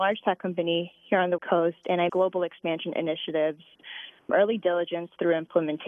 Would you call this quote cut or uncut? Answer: cut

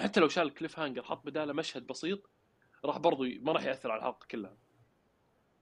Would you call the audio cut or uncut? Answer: uncut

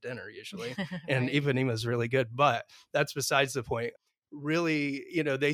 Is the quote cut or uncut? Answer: uncut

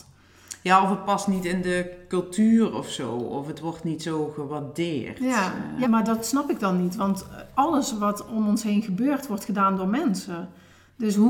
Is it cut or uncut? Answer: cut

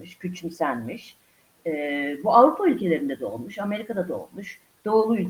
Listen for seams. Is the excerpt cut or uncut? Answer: uncut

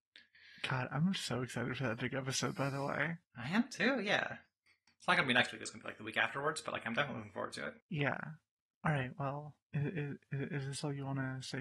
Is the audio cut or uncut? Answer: cut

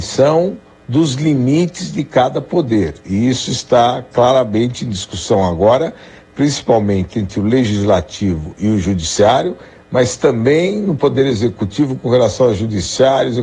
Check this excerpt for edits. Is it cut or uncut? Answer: uncut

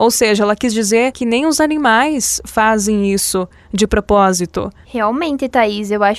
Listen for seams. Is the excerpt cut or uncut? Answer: uncut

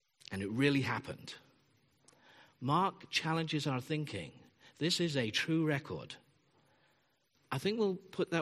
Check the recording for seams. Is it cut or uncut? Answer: uncut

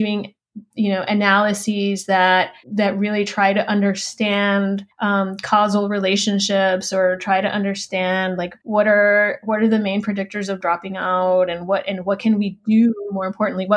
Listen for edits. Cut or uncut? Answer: cut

